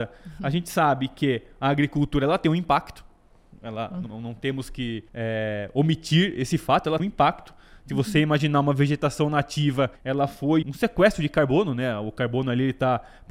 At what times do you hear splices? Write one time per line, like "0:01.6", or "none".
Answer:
0:04.1
0:05.1
0:07.0
0:10.0
0:10.6